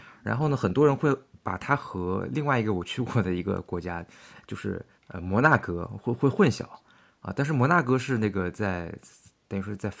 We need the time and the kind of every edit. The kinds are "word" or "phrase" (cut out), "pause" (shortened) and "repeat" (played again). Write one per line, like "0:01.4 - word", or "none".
0:05.0 - pause